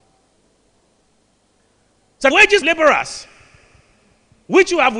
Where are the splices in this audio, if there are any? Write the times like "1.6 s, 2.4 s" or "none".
2.3 s, 2.6 s